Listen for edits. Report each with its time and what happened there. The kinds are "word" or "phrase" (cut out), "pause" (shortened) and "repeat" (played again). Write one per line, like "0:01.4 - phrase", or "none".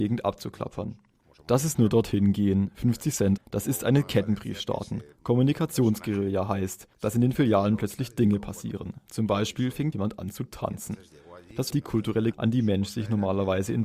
0:01.7 - word
0:03.4 - word
0:05.1 - pause
0:09.9 - word
0:11.7 - word
0:12.3 - word